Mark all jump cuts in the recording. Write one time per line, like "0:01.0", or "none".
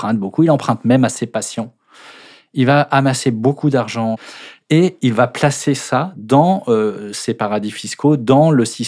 none

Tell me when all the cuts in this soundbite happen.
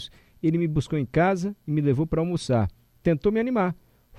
none

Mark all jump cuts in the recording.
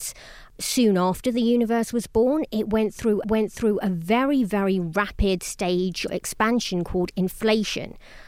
0:03.2
0:06.1

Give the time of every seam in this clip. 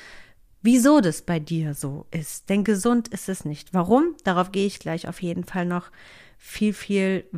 none

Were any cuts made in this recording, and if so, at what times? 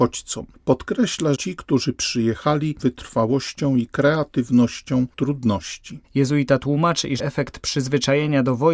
0:01.3
0:02.8
0:05.1
0:06.0
0:07.2

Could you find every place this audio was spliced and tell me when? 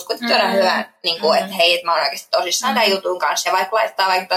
none

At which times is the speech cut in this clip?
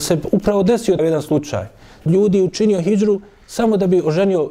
0:01.0
0:02.1

